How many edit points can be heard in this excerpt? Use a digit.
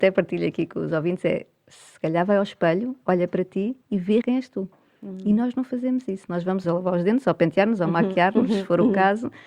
3